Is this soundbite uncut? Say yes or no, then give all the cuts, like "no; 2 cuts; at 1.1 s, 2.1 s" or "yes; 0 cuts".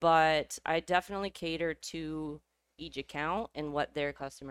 yes; 0 cuts